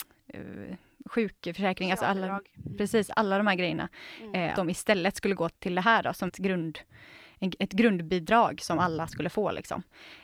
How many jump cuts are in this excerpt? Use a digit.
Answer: 3